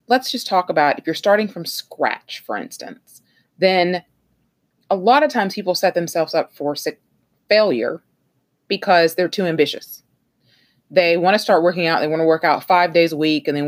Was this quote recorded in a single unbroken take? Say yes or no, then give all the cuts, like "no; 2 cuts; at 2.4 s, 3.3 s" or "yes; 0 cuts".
yes; 0 cuts